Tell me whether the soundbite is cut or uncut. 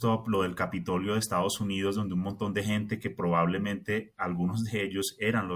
uncut